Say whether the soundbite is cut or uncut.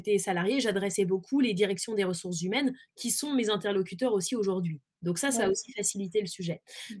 uncut